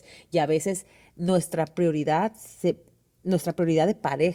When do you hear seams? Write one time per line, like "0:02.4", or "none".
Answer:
none